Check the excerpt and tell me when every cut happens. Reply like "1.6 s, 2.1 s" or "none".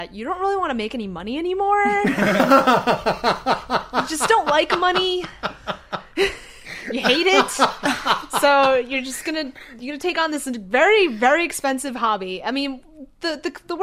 none

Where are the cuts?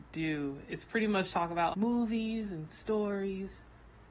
1.3 s, 1.7 s

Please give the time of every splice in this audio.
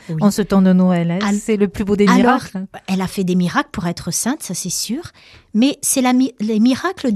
none

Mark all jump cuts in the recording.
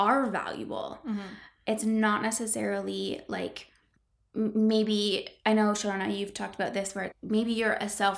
4.0 s, 7.1 s

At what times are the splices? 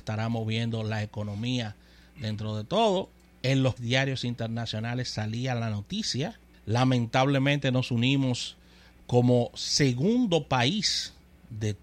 3.8 s, 6.5 s

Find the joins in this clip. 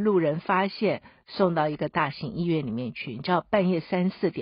none

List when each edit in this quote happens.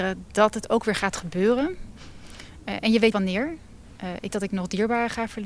3.1 s, 4.3 s

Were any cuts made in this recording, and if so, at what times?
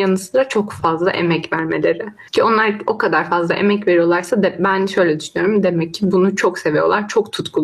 2.3 s

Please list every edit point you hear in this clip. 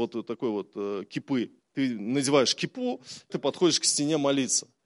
1.6 s, 3.3 s

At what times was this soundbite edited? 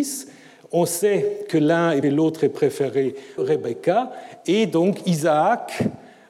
2.0 s, 3.4 s

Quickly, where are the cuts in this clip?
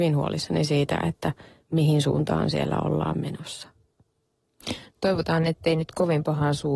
none

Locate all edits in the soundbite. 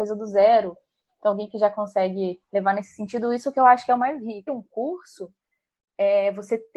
2.4 s, 4.5 s

